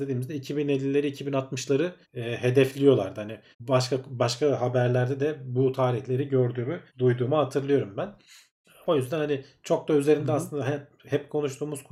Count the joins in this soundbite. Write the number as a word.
four